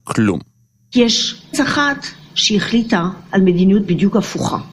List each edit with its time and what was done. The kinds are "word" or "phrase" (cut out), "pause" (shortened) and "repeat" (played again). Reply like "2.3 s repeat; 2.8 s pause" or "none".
1.5 s word; 3.3 s pause